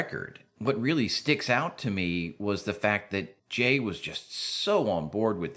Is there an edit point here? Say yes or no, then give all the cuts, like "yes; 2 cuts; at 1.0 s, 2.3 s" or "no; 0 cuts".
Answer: yes; 1 cut; at 3.4 s